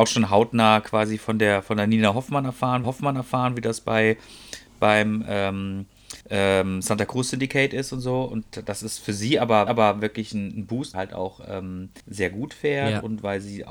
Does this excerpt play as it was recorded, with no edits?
no; 5 cuts; at 2.8 s, 6.2 s, 9.7 s, 10.9 s, 12.0 s

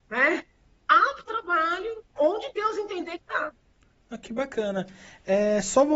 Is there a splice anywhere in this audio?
yes; 3 cuts; at 1.3 s, 2.2 s, 3.2 s

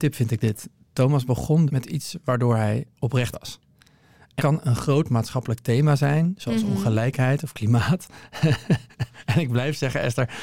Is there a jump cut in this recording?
yes; 3 cuts; at 1.7 s, 3.3 s, 4.4 s

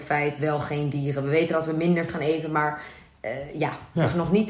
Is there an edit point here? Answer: yes; 1 cut; at 2.1 s

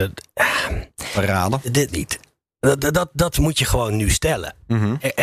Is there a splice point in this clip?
yes; 1 cut; at 1.9 s

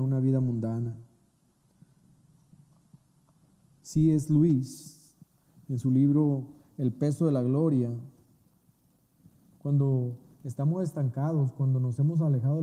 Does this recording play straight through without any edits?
yes; 0 cuts

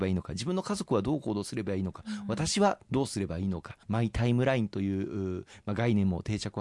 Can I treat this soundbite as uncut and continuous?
no; 1 cut; at 3.8 s

